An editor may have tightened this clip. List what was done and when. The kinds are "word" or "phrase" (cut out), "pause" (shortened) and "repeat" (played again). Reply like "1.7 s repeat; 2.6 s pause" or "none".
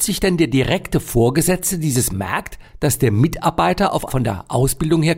2.1 s phrase; 4.1 s word